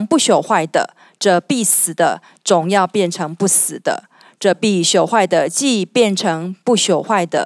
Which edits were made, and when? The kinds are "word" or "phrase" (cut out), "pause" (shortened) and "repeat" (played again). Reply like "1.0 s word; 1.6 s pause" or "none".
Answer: none